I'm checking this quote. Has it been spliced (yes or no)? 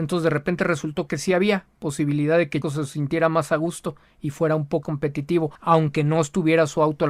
yes